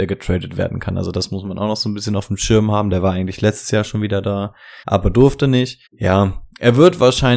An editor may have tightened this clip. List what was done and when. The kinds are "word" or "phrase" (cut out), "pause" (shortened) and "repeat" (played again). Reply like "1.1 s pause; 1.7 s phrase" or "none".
4.8 s pause; 5.9 s pause

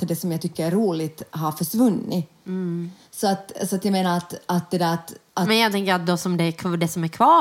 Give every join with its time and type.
2.4 s pause

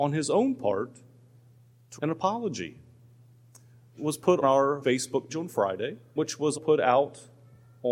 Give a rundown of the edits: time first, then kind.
2.0 s word; 4.0 s word; 4.4 s word; 4.8 s word; 5.3 s word; 6.2 s word; 6.5 s word

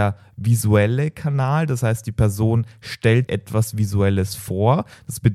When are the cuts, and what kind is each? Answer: 3.3 s word

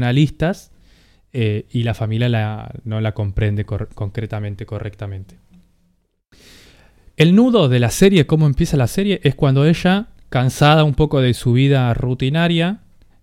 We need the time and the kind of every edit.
none

